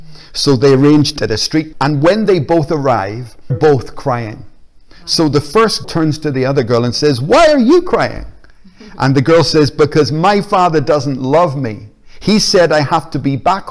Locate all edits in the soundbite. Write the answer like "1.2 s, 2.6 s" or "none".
1.2 s, 1.7 s, 3.5 s, 5.8 s